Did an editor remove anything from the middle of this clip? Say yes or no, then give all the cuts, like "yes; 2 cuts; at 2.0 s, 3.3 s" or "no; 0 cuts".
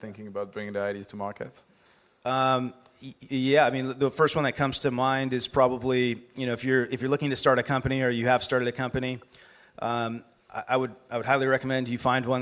no; 0 cuts